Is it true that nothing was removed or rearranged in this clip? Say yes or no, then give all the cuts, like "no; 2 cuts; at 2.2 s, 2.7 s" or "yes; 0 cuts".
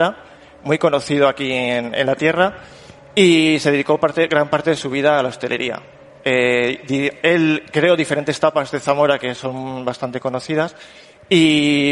yes; 0 cuts